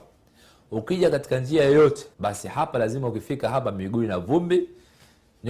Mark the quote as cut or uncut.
cut